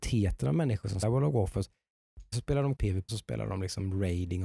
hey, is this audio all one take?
no; 4 cuts; at 1.0 s, 2.3 s, 2.8 s, 3.1 s

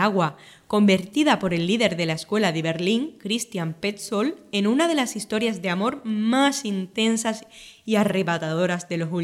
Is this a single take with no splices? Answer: yes; 0 cuts

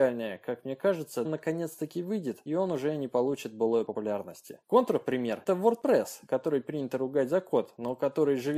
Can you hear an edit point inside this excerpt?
yes; 3 cuts; at 1.2 s, 2.5 s, 5.5 s

